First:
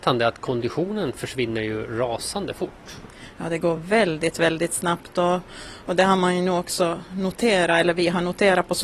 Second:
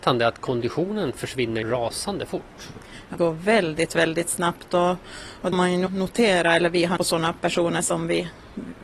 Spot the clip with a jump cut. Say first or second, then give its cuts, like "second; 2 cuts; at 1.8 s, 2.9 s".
second; 5 cuts; at 1.6 s, 3.1 s, 5.5 s, 5.9 s, 7.0 s